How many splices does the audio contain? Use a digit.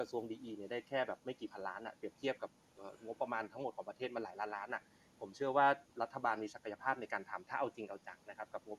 1